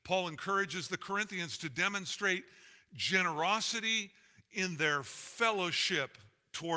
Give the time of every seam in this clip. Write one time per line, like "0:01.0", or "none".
none